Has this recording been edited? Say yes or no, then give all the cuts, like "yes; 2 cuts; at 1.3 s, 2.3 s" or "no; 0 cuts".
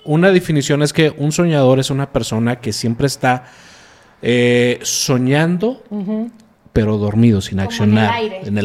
no; 0 cuts